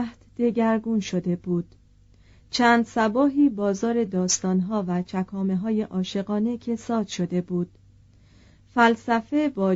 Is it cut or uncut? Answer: uncut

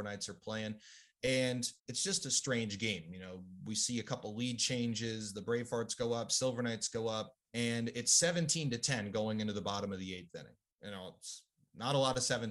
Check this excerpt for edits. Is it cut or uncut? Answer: cut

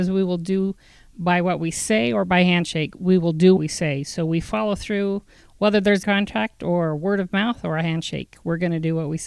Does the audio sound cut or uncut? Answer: cut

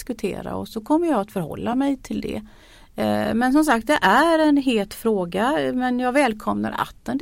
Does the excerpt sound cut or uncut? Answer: uncut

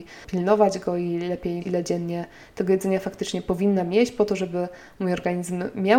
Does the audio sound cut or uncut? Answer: cut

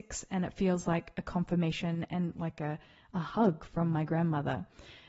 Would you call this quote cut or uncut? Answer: uncut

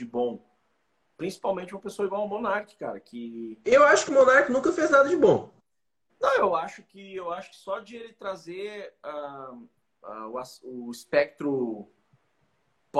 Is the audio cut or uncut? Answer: uncut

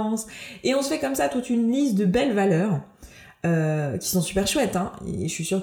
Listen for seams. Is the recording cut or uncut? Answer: uncut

